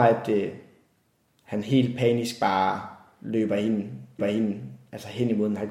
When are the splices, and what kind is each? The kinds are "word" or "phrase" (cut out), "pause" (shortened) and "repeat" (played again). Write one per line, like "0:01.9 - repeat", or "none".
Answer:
0:04.2 - repeat